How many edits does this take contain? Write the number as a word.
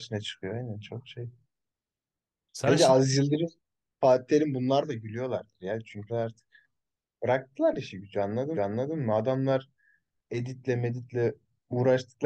two